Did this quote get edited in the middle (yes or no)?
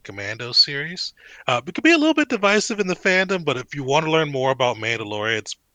no